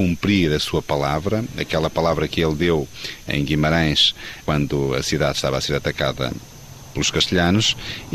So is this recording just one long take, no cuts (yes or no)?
yes